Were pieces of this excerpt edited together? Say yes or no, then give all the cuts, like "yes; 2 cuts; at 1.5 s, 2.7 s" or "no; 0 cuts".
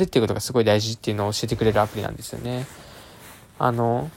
no; 0 cuts